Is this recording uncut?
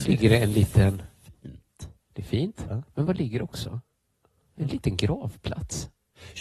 yes; 0 cuts

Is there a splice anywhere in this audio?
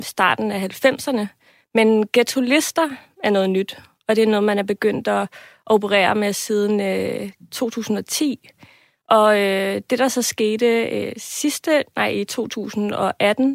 no; 0 cuts

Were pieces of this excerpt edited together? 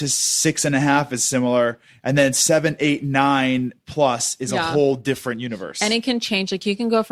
no; 0 cuts

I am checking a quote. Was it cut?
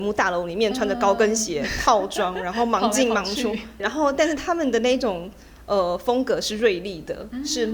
yes; 1 cut; at 3.8 s

